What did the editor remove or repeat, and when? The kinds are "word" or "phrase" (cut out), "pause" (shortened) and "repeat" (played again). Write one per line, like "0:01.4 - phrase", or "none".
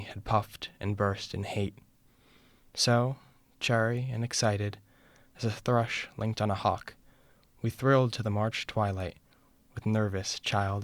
none